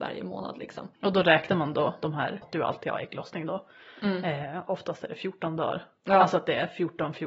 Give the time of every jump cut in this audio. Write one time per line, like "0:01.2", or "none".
0:00.9
0:02.4